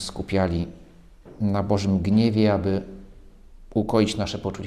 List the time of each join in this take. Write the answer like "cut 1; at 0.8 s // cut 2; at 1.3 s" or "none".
none

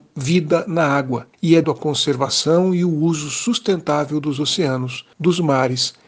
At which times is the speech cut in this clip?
cut 1; at 1.6 s

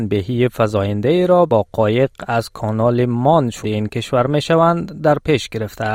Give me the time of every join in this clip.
cut 1; at 1.5 s // cut 2; at 3.6 s

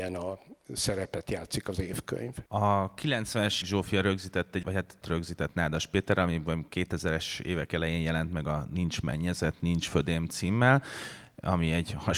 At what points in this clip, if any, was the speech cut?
cut 1; at 2.5 s // cut 2; at 3.6 s // cut 3; at 4.6 s // cut 4; at 5.0 s

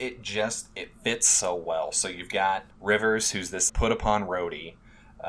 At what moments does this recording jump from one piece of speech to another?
cut 1; at 2.7 s // cut 2; at 3.7 s

